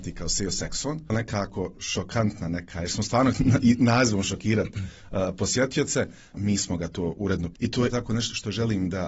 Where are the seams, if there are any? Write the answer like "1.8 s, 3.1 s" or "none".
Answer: 1.1 s, 3.3 s, 7.5 s, 7.9 s